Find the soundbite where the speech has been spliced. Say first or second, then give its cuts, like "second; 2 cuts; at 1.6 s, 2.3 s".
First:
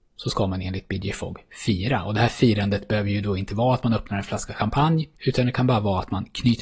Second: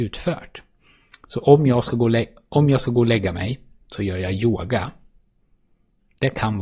first; 1 cut; at 5.1 s